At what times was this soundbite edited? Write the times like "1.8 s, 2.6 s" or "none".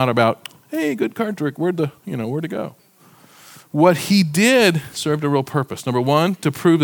none